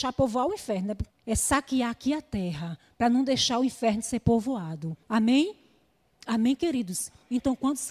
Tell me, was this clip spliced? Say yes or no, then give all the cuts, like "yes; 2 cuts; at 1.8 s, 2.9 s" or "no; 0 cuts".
yes; 2 cuts; at 1.1 s, 5.0 s